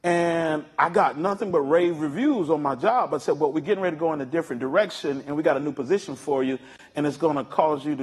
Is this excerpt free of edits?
yes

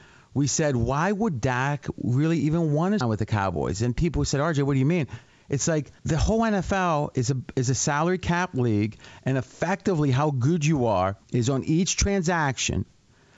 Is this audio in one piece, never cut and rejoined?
no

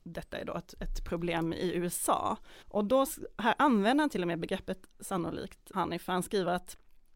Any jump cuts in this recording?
yes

